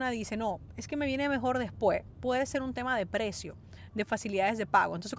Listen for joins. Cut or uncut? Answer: uncut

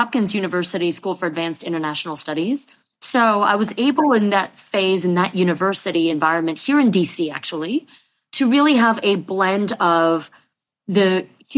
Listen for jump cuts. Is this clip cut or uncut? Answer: uncut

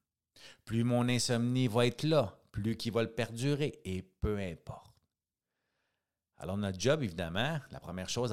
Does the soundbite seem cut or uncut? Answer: uncut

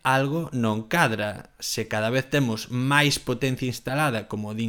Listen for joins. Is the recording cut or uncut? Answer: uncut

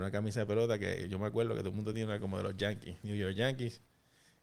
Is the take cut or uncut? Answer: uncut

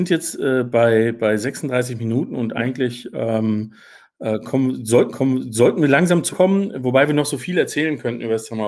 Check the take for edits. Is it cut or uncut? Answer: cut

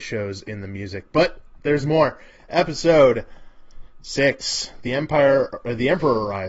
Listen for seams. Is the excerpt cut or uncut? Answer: uncut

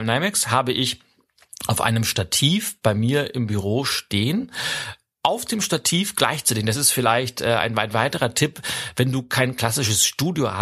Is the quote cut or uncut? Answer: uncut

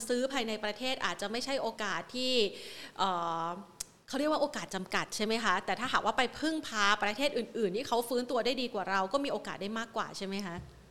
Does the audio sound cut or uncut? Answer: uncut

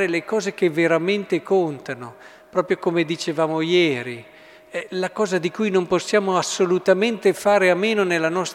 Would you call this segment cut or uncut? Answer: uncut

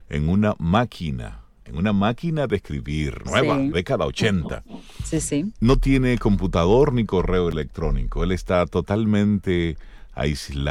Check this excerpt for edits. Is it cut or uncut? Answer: cut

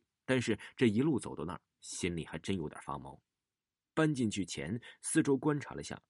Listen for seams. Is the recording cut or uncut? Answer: uncut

